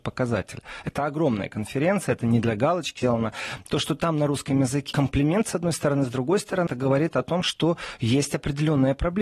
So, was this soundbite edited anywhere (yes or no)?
yes